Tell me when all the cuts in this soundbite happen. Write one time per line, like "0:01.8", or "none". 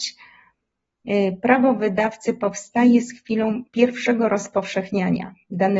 0:03.7